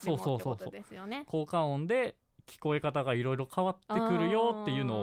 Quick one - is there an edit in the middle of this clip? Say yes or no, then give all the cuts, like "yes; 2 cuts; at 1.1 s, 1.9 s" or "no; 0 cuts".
no; 0 cuts